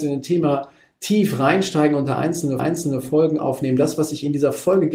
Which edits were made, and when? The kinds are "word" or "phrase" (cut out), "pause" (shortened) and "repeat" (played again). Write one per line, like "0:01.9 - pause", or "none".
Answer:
0:02.6 - repeat